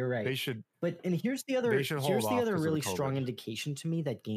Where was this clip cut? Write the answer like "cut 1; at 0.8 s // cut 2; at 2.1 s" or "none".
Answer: none